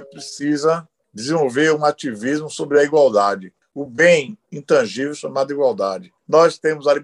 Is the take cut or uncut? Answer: uncut